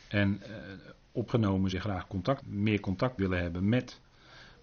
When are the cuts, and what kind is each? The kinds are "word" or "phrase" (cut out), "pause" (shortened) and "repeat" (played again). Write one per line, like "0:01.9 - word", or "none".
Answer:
0:01.3 - word
0:01.7 - word
0:02.4 - word
0:03.2 - word